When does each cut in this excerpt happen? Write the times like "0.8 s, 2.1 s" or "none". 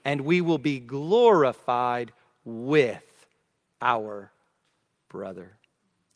3.7 s